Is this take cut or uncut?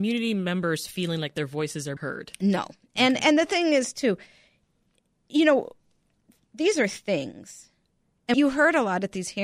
cut